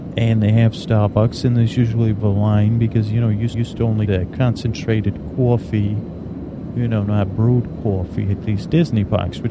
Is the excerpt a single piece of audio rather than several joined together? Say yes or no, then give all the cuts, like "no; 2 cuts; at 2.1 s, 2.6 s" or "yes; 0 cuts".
no; 3 cuts; at 2.2 s, 3.5 s, 4.1 s